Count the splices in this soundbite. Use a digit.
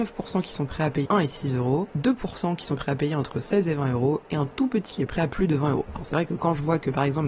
3